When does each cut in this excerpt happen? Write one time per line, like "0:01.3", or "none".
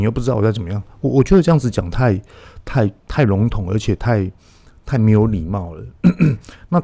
none